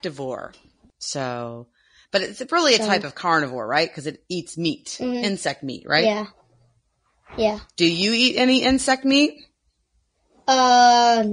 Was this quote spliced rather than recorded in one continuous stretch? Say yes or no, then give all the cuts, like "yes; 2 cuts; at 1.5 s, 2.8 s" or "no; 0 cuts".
no; 0 cuts